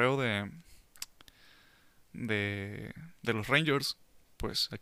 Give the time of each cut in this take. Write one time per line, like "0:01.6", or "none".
0:03.2